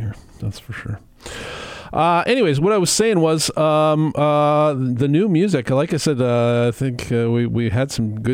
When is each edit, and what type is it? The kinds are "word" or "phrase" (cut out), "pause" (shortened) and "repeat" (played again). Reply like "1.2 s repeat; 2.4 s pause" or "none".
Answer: none